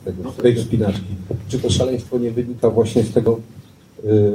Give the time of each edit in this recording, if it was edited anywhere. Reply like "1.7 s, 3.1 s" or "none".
none